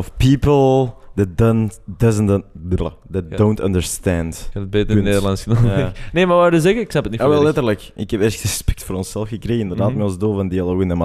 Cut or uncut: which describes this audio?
uncut